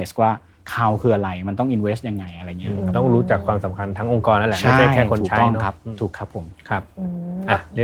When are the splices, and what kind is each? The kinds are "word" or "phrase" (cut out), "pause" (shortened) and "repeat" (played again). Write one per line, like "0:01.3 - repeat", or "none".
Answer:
none